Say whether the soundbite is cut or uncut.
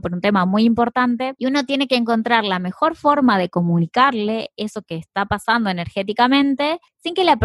uncut